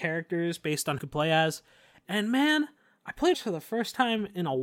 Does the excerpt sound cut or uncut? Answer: cut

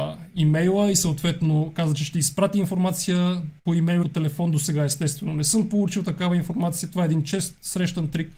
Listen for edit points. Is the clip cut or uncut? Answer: cut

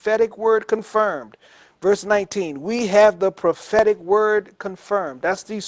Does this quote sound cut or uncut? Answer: uncut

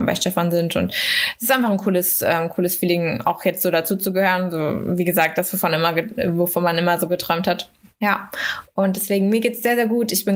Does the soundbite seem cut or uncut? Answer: uncut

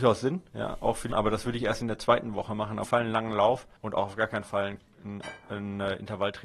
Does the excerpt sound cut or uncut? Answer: cut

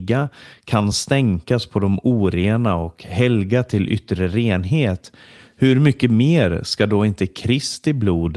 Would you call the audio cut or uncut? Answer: uncut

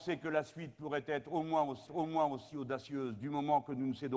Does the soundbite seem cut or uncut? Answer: cut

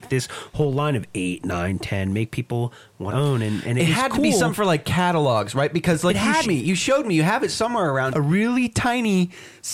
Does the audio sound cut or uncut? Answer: cut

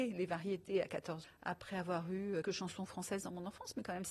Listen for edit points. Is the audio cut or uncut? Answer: cut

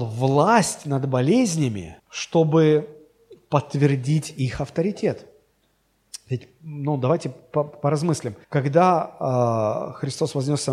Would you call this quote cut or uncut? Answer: cut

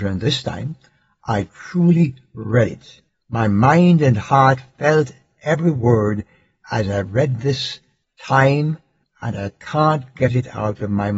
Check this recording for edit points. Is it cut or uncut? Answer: uncut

